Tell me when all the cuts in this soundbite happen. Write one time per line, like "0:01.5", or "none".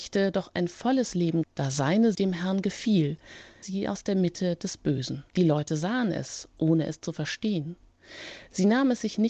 0:01.4
0:02.1
0:03.6
0:05.3